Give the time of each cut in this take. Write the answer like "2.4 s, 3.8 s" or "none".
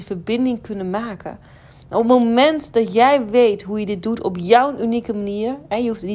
none